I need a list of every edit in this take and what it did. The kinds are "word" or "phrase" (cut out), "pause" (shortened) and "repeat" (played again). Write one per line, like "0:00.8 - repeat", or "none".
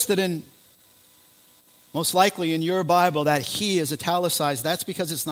none